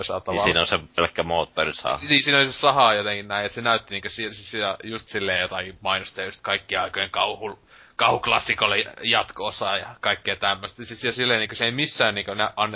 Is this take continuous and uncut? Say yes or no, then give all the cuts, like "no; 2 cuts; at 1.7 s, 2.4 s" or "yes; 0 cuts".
yes; 0 cuts